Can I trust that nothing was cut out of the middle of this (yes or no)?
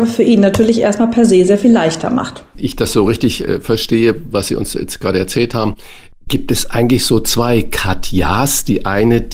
yes